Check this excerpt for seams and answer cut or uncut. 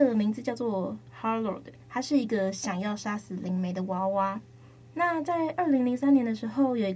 cut